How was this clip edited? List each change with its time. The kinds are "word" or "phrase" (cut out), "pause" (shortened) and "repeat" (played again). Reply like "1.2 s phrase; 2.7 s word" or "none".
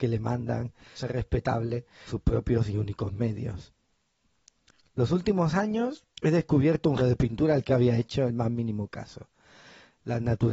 1.0 s phrase; 2.1 s word; 6.1 s pause; 7.0 s word; 7.7 s word